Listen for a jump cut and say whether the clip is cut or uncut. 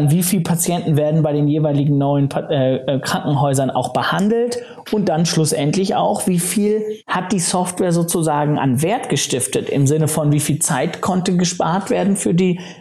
cut